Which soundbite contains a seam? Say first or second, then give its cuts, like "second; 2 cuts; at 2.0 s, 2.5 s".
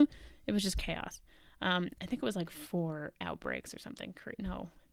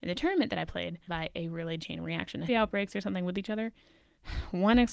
second; 3 cuts; at 1.1 s, 1.8 s, 2.5 s